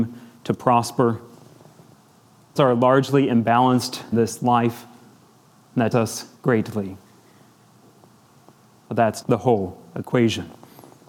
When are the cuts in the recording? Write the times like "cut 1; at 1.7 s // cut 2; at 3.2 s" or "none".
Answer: cut 1; at 2.6 s // cut 2; at 4.1 s // cut 3; at 5.9 s // cut 4; at 9.2 s